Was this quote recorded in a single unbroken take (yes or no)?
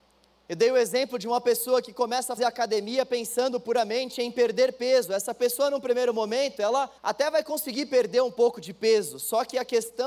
no